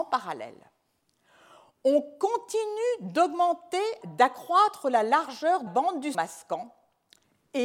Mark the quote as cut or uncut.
cut